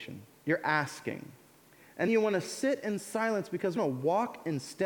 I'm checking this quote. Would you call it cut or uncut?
cut